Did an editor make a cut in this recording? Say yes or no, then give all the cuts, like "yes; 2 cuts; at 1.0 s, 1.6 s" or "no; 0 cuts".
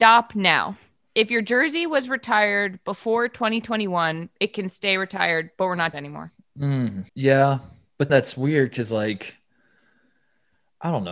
yes; 3 cuts; at 5.9 s, 7.1 s, 8.1 s